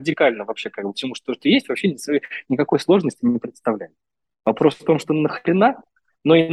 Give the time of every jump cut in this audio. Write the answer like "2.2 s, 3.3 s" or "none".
0.9 s